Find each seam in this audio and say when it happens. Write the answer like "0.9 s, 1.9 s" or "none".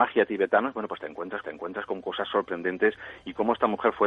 1.4 s

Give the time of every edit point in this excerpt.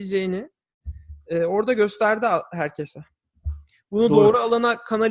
none

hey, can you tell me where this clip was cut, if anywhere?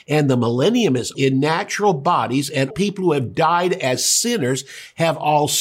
1.1 s, 2.7 s

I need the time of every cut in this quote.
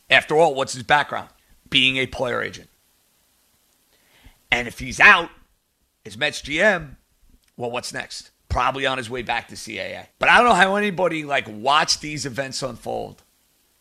1.4 s, 8.4 s, 10.1 s

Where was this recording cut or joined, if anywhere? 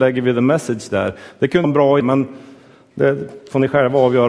1.6 s, 2.0 s

